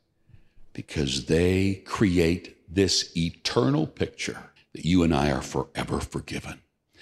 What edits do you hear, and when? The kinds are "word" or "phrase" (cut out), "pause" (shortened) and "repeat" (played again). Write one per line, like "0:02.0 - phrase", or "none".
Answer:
0:04.6 - pause